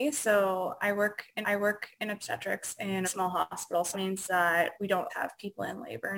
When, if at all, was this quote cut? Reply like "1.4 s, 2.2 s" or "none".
1.4 s, 3.0 s, 3.9 s, 5.1 s